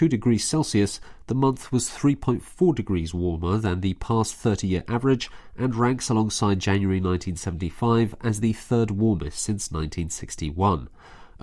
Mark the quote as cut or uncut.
uncut